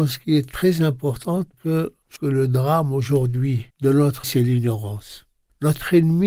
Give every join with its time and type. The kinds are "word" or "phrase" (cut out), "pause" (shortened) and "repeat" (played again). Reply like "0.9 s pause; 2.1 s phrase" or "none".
1.5 s word; 2.2 s word; 3.7 s pause; 4.2 s word